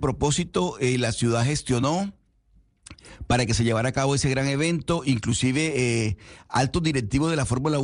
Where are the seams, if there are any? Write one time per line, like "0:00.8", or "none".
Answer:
none